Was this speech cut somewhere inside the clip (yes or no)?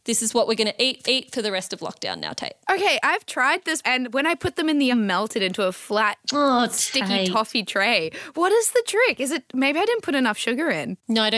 yes